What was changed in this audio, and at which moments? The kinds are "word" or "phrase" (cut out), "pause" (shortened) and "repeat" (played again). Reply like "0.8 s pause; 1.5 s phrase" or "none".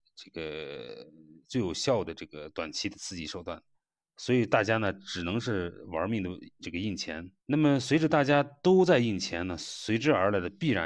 3.7 s pause; 7.4 s pause